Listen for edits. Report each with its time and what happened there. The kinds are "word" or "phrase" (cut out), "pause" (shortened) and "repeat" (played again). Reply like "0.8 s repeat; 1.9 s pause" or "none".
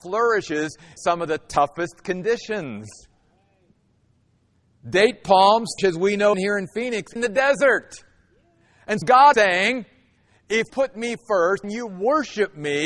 1.0 s word; 5.8 s word; 6.3 s word; 7.2 s word; 9.0 s word; 9.3 s word; 10.7 s word; 11.6 s word